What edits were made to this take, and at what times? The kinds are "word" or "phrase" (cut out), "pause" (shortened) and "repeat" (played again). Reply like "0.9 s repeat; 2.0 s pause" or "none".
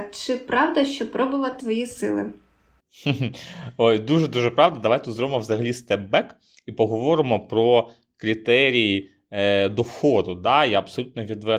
1.6 s phrase